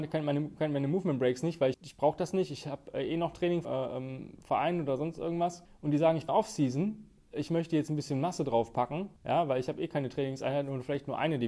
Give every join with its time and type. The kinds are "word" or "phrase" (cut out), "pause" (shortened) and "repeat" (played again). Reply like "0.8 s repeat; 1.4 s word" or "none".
1.7 s word; 3.6 s word; 5.7 s pause; 6.3 s phrase; 9.2 s pause